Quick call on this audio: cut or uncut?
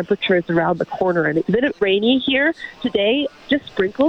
cut